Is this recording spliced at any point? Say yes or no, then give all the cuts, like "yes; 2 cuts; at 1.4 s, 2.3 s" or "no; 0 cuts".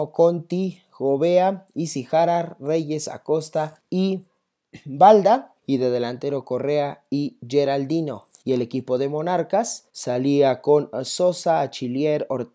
yes; 4 cuts; at 3.8 s, 5.6 s, 8.4 s, 9.9 s